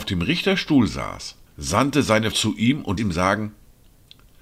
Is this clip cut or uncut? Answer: cut